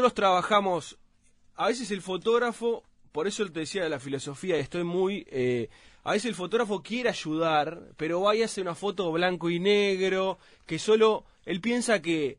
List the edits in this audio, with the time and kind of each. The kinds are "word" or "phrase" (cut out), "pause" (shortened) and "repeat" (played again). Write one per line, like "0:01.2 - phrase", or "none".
none